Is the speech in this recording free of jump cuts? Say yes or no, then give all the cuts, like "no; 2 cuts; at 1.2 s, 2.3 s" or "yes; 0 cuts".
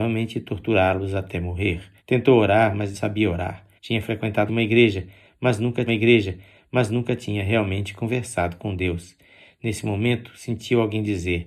no; 5 cuts; at 2.0 s, 2.9 s, 3.8 s, 4.5 s, 5.9 s